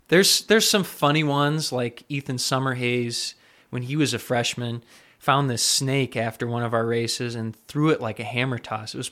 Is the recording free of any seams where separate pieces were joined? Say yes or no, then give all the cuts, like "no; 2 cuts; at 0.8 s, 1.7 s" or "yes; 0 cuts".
yes; 0 cuts